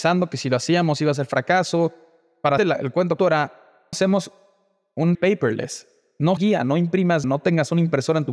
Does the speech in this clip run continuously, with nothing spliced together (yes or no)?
no